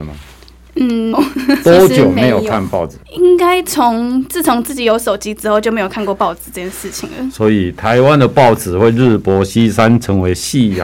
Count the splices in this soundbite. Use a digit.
2